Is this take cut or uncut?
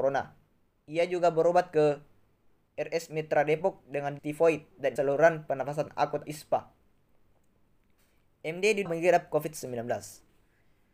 cut